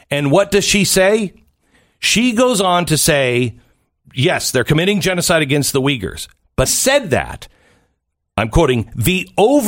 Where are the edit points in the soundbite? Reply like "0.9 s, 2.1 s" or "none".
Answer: 6.7 s